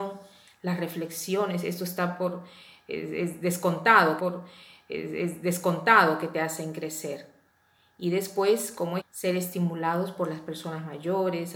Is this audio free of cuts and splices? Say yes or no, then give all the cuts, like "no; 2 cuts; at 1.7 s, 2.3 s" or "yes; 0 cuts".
no; 2 cuts; at 4.2 s, 9.0 s